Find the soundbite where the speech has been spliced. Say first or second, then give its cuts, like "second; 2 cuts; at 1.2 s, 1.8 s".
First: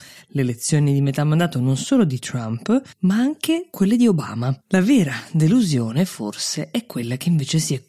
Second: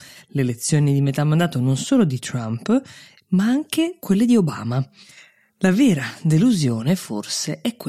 first; 2 cuts; at 2.9 s, 4.6 s